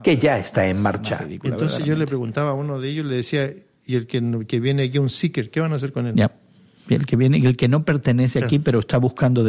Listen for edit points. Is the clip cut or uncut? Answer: uncut